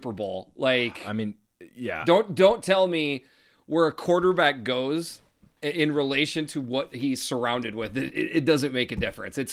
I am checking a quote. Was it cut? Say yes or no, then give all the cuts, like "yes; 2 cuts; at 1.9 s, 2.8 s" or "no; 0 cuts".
no; 0 cuts